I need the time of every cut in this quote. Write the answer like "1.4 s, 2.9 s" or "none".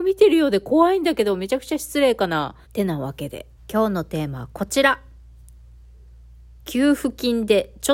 2.6 s, 3.6 s